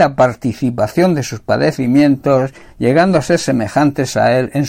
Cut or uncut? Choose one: uncut